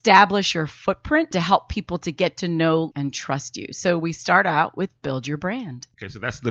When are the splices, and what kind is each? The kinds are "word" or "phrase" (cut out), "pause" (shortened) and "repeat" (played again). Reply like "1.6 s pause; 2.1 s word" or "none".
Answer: 1.3 s word; 2.9 s word